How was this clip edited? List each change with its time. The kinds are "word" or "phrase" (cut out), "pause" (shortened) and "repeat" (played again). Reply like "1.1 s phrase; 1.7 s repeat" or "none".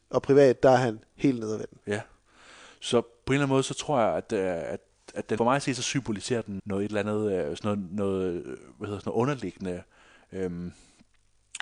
1.8 s pause; 5.4 s phrase; 6.6 s word